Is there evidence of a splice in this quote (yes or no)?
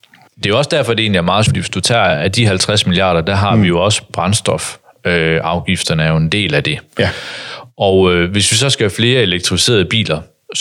yes